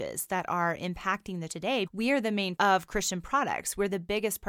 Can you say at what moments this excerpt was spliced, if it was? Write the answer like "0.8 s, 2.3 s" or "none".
1.5 s, 1.9 s, 2.6 s